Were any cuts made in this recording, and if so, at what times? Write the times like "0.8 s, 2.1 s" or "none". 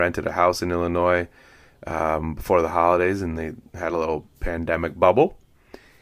none

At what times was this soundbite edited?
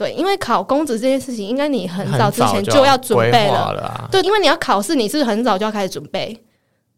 4.2 s

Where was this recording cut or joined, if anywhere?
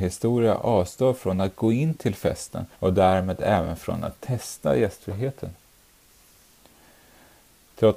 2.7 s

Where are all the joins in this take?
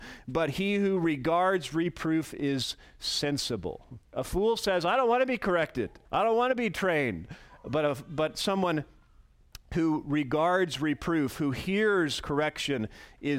4.0 s, 6.1 s

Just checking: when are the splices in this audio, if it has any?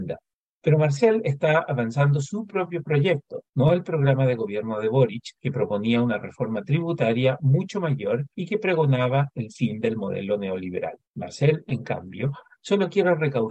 3.5 s, 5.4 s, 8.3 s, 11.0 s

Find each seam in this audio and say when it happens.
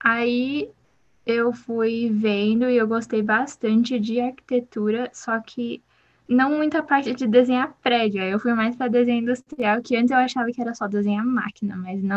none

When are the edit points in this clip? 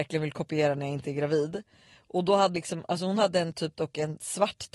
2.5 s

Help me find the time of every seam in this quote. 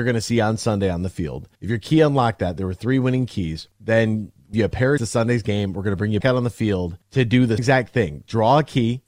1.5 s, 3.7 s, 4.5 s, 5.0 s, 6.2 s, 7.0 s, 7.6 s

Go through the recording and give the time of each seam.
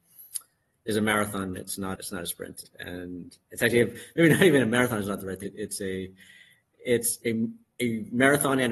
1.9 s, 2.6 s, 5.4 s, 7.2 s

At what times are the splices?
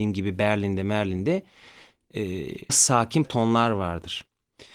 2.7 s, 3.2 s

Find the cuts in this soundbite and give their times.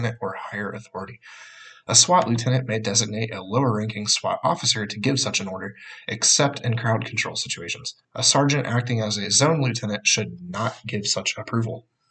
8.0 s

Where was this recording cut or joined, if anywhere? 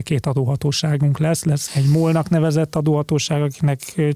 1.7 s

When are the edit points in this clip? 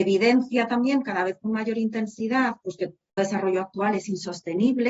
3.2 s

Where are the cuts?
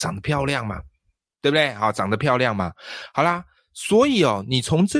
none

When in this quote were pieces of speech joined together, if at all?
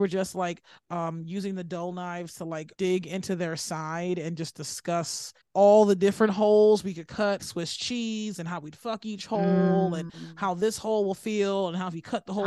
2.7 s, 5.4 s, 7.4 s

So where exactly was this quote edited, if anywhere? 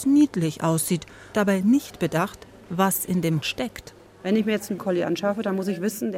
1.3 s, 3.4 s, 4.8 s

